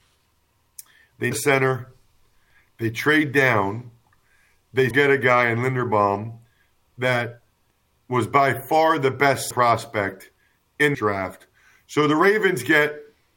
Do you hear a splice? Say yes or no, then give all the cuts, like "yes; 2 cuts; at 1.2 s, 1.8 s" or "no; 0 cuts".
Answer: yes; 4 cuts; at 1.3 s, 4.9 s, 9.5 s, 10.9 s